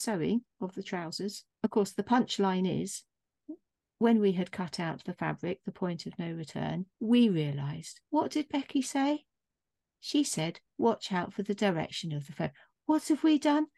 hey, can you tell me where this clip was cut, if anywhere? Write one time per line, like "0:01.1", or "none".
0:01.5
0:03.7
0:06.9
0:08.0